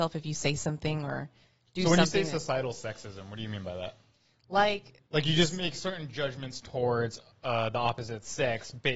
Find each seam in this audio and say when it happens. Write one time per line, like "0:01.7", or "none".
0:05.1

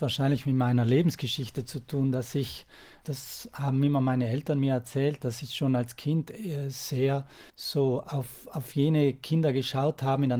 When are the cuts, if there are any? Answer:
0:07.5

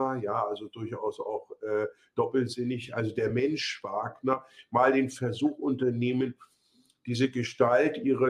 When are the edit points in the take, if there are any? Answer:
none

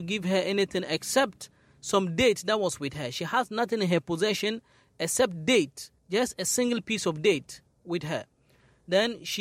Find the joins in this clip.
0:06.0

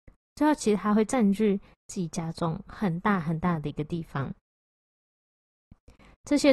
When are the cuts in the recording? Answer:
none

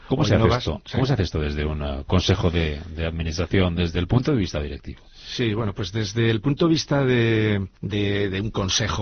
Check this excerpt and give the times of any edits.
0:07.7

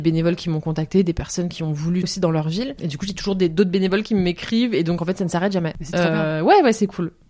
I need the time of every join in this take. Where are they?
0:02.0

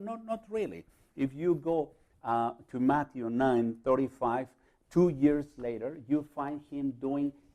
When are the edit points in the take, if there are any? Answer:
none

